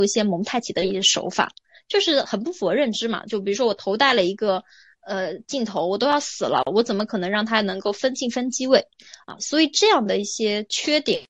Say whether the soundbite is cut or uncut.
uncut